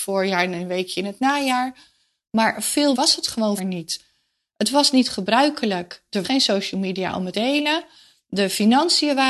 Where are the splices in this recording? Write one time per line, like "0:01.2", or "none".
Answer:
0:02.9
0:03.6
0:06.2
0:07.3